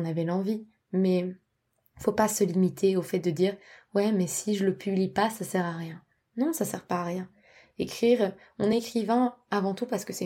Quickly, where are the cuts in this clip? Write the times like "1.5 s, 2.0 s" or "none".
none